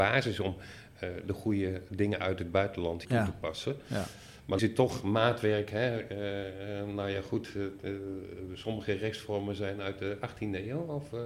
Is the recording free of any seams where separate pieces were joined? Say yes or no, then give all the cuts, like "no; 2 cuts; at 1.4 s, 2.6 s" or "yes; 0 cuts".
no; 3 cuts; at 1.9 s, 3.0 s, 4.6 s